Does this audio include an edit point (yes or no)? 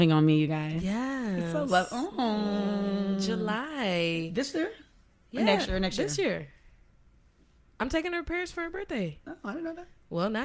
no